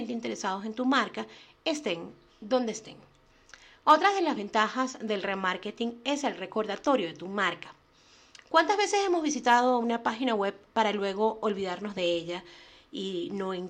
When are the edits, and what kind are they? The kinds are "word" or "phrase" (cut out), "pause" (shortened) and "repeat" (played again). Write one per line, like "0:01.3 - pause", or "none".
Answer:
none

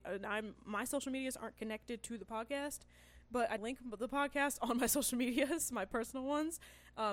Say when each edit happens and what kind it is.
0:03.6 - word

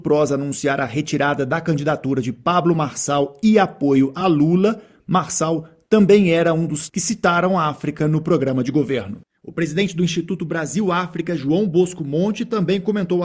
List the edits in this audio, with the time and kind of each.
none

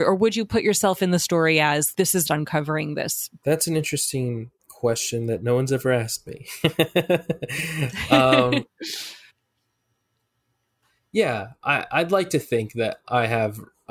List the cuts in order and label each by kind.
0:01.9 - word
0:02.3 - phrase
0:03.4 - phrase
0:04.6 - pause
0:09.3 - pause

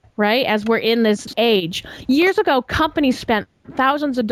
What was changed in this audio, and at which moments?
0:01.3 - word

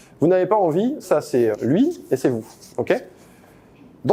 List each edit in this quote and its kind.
0:01.0 - word
0:01.5 - word
0:02.2 - word

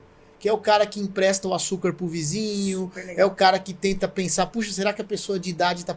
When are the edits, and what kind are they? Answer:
none

